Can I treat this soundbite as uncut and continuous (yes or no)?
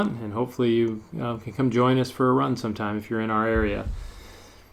yes